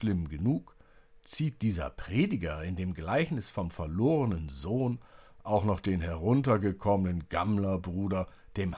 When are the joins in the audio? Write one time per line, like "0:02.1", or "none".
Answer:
none